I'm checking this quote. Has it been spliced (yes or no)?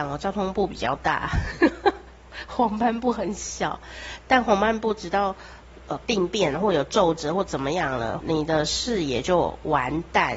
yes